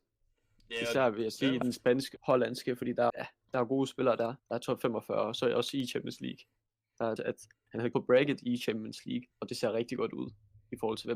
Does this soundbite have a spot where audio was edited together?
yes; 6 cuts; at 2.2 s, 3.1 s, 4.4 s, 7.2 s, 7.9 s, 9.3 s

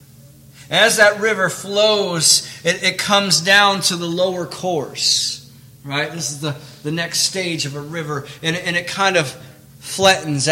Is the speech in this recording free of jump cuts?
yes; 0 cuts

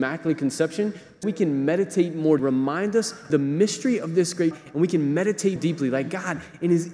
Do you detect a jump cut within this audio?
yes; 5 cuts; at 1.2 s, 2.4 s, 3.3 s, 4.5 s, 5.6 s

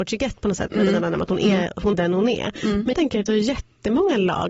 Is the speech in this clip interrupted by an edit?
yes; 3 cuts; at 1.9 s, 2.9 s, 3.3 s

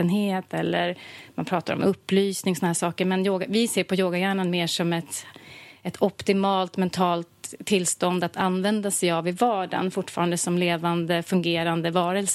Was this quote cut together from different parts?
no; 0 cuts

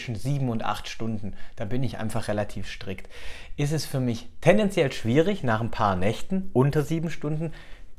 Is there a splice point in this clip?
no; 0 cuts

